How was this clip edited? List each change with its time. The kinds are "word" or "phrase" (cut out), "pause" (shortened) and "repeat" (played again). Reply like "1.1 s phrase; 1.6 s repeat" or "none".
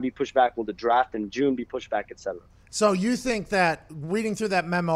none